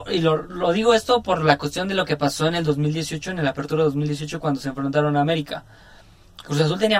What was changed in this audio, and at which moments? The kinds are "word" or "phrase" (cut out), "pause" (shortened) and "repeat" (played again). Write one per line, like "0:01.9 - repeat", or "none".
none